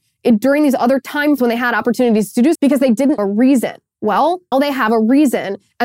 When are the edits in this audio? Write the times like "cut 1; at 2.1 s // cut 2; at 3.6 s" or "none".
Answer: cut 1; at 1.4 s // cut 2; at 2.5 s // cut 3; at 3.2 s // cut 4; at 4.5 s